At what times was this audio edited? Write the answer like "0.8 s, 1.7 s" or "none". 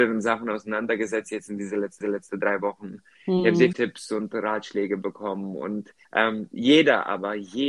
2.0 s, 3.7 s, 6.0 s

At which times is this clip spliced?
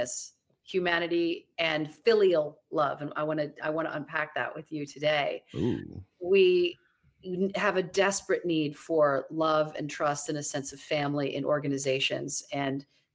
none

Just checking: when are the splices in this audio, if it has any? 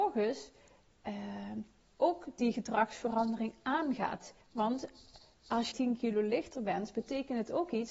4.4 s, 5.7 s

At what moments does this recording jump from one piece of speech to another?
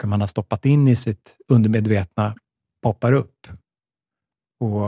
none

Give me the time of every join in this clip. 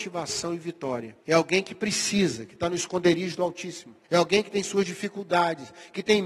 1.2 s, 4.0 s

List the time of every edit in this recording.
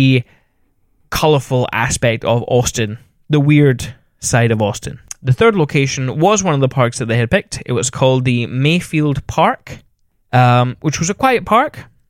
none

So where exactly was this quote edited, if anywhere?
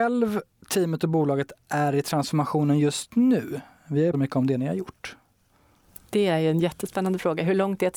4.1 s

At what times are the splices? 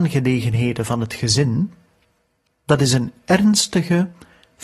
none

